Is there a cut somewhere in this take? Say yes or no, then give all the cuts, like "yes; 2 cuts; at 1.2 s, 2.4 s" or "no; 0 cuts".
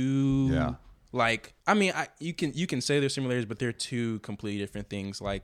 yes; 1 cut; at 1.6 s